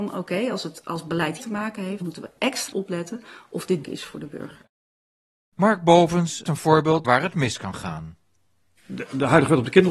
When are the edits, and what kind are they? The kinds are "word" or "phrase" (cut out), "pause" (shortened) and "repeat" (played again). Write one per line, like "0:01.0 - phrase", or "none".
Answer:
0:01.4 - word
0:02.0 - word
0:02.7 - word
0:03.8 - word
0:06.5 - word
0:07.0 - word